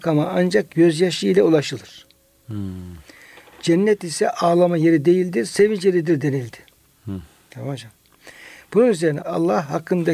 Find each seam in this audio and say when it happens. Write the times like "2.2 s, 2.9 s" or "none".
none